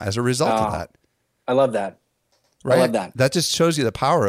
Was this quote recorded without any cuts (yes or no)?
yes